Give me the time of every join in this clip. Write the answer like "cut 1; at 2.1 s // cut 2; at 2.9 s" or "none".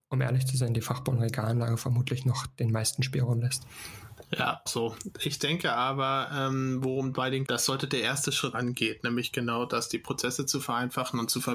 cut 1; at 4.7 s // cut 2; at 7.4 s // cut 3; at 8.5 s